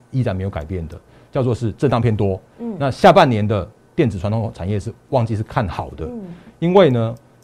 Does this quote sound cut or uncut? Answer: uncut